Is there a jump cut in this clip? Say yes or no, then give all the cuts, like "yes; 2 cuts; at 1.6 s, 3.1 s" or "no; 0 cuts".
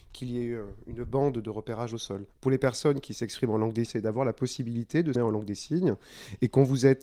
yes; 3 cuts; at 2.3 s, 3.8 s, 5.1 s